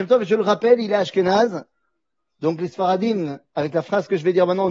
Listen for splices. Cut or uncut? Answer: uncut